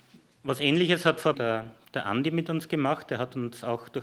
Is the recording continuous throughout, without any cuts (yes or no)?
no